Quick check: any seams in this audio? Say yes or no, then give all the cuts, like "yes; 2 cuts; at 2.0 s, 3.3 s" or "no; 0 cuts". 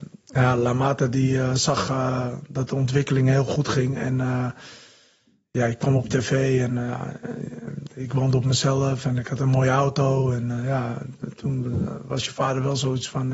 no; 0 cuts